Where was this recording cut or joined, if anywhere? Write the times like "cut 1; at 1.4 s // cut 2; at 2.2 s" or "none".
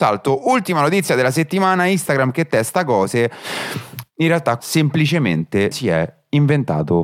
cut 1; at 4.6 s // cut 2; at 5.7 s